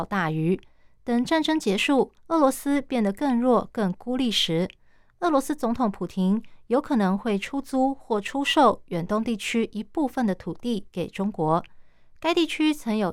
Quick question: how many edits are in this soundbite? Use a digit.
1